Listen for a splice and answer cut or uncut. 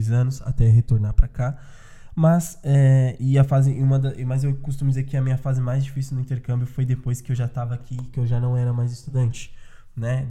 uncut